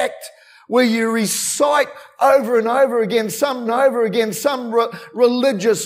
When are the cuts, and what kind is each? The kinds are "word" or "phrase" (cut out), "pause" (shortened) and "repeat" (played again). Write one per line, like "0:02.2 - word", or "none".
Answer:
0:03.7 - repeat